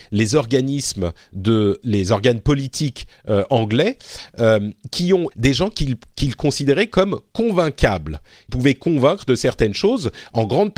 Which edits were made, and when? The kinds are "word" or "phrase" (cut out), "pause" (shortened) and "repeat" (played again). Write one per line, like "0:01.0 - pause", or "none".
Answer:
0:01.8 - word
0:05.3 - word
0:08.5 - word